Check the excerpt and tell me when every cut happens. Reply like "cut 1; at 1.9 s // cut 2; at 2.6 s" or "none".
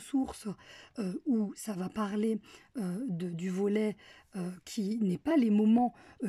none